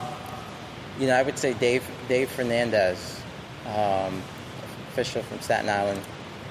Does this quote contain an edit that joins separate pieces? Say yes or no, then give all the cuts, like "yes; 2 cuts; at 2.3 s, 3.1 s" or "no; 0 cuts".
no; 0 cuts